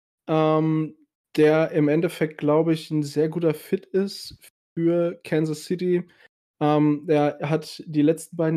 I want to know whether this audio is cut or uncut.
uncut